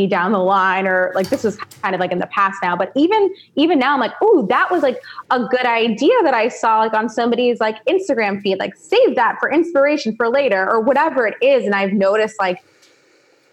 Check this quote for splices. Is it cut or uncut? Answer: uncut